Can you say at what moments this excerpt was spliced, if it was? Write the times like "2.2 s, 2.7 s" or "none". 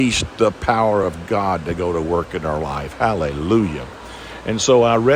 none